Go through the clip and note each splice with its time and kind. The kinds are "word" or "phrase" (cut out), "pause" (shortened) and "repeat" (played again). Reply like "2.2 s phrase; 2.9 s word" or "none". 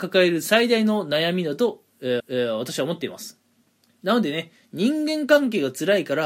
2.2 s repeat; 3.6 s pause